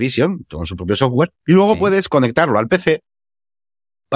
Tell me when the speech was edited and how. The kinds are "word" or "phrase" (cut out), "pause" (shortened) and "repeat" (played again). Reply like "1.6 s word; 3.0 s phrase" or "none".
1.4 s pause